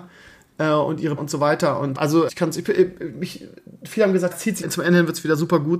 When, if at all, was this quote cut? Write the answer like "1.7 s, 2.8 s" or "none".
1.2 s, 1.9 s, 2.3 s, 4.3 s, 4.6 s